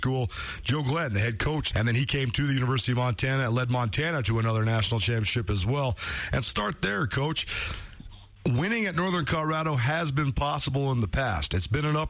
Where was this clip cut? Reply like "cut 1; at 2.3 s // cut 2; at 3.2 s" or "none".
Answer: cut 1; at 1.7 s // cut 2; at 6.5 s

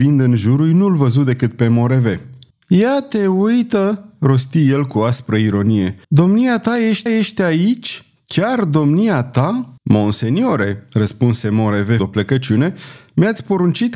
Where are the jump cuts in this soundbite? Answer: cut 1; at 2.5 s // cut 2; at 6.0 s // cut 3; at 7.1 s // cut 4; at 9.8 s // cut 5; at 12.0 s

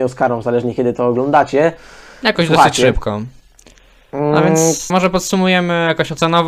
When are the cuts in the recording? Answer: cut 1; at 4.9 s

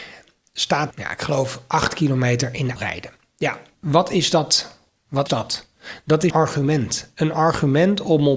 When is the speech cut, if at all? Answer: cut 1; at 0.9 s // cut 2; at 2.8 s // cut 3; at 3.7 s // cut 4; at 5.3 s // cut 5; at 6.3 s

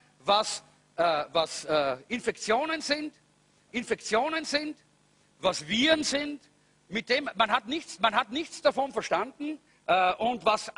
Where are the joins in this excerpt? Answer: cut 1; at 3.7 s // cut 2; at 8.0 s // cut 3; at 9.7 s

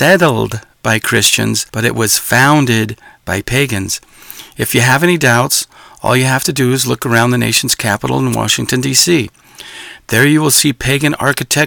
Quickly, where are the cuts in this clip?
cut 1; at 1.7 s

